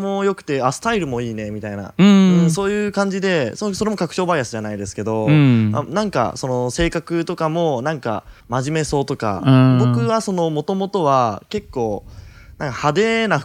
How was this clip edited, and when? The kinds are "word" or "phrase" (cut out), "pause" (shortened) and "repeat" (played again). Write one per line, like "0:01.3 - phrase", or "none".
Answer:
0:08.4 - pause

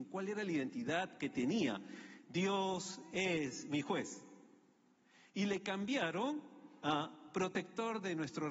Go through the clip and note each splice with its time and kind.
none

